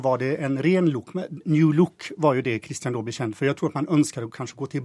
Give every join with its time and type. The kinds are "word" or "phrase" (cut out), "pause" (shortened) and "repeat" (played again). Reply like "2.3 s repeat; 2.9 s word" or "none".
none